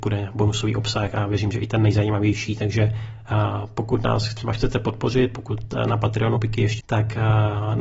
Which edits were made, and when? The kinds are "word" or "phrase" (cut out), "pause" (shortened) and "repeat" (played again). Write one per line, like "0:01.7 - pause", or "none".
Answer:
0:06.4 - word
0:06.8 - word